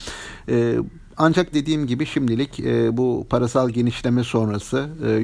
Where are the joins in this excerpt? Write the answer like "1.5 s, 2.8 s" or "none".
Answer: 1.5 s